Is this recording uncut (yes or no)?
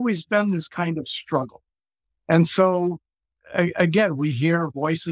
yes